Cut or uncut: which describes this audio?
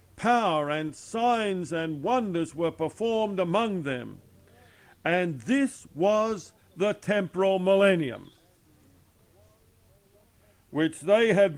uncut